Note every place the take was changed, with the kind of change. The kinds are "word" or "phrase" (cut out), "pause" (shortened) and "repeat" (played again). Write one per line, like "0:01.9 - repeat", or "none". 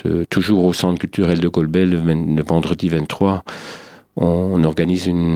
none

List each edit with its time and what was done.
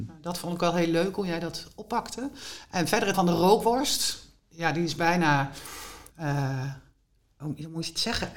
0:03.1 - word
0:06.1 - pause

